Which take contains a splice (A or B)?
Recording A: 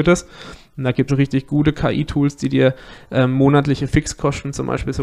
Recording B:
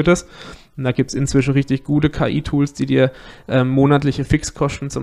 A